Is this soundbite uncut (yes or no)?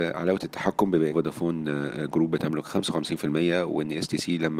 no